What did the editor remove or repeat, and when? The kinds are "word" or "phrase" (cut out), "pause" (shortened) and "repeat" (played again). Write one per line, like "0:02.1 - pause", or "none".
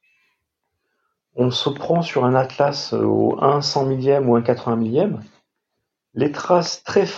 none